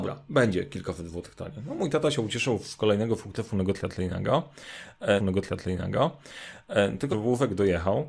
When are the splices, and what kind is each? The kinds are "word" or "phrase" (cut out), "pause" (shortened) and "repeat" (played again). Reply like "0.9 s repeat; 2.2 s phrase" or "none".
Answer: 5.2 s repeat; 7.1 s phrase